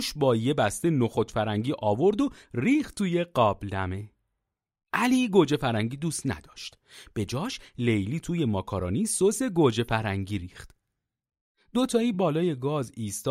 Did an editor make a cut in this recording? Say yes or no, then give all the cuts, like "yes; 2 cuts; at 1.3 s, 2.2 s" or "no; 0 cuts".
no; 0 cuts